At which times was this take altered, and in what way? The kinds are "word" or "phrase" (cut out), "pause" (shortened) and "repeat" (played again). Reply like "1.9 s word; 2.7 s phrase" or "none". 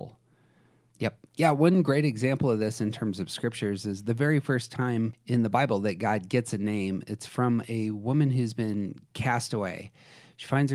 1.3 s pause